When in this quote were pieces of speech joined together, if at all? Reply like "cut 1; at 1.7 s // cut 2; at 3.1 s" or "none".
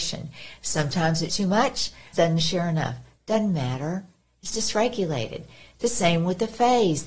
cut 1; at 1.3 s // cut 2; at 2.1 s // cut 3; at 4.5 s